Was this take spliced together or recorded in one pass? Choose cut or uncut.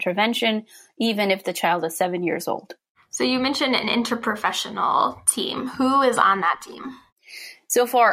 uncut